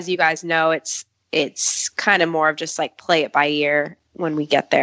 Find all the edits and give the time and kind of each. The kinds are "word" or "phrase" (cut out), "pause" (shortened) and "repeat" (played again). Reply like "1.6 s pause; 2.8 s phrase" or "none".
none